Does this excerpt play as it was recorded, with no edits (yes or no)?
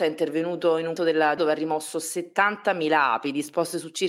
no